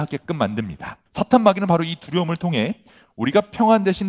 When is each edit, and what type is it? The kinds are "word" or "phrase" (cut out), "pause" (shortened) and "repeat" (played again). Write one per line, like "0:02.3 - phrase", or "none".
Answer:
0:01.1 - pause